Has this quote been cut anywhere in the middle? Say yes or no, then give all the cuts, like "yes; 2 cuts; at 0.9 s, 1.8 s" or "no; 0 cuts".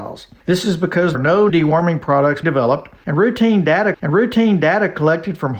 yes; 4 cuts; at 1.1 s, 1.5 s, 2.4 s, 3.9 s